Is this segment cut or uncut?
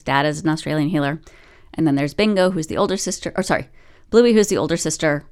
uncut